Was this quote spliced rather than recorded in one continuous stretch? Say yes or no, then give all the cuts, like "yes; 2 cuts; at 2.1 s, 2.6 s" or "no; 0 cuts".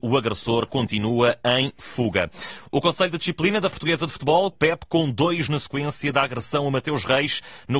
yes; 3 cuts; at 3.7 s, 4.5 s, 5.5 s